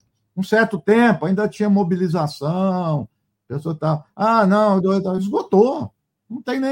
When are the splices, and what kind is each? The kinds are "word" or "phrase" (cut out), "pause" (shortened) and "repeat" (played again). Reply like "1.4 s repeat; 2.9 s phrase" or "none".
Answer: none